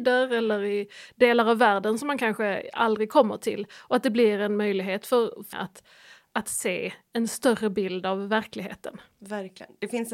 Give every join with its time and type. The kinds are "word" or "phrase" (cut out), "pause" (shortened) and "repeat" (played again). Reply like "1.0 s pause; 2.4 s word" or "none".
5.5 s phrase